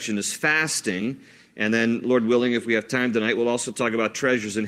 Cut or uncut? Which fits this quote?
uncut